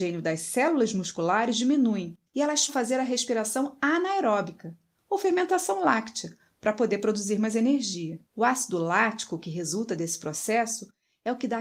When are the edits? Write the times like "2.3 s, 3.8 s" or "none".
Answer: 2.3 s, 2.7 s, 8.3 s